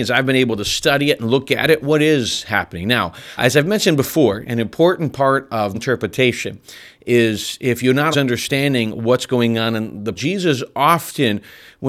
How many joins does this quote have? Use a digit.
4